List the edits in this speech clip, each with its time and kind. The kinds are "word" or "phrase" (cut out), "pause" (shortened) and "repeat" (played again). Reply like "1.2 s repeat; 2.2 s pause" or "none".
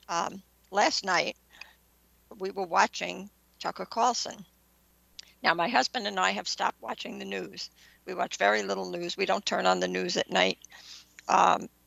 none